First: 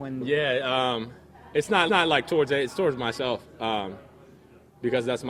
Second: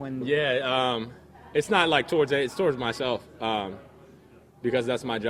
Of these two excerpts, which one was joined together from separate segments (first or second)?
first